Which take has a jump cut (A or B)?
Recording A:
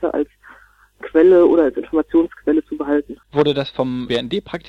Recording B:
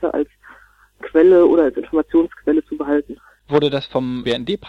A